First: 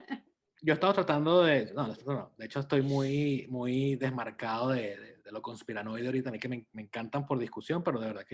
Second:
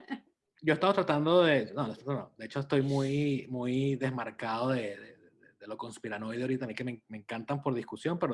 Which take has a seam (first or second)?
first